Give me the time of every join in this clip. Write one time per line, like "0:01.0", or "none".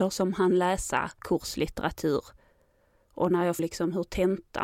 0:01.2
0:03.6